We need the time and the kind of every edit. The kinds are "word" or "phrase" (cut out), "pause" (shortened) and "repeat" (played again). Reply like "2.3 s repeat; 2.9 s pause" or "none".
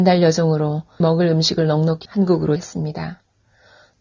1.0 s word; 2.1 s word; 2.6 s word